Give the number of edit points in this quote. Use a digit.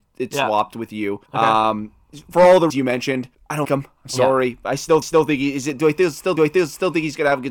6